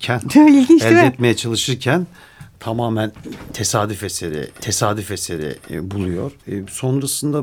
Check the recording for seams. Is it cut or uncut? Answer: cut